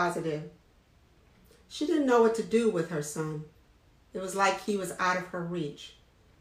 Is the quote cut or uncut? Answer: uncut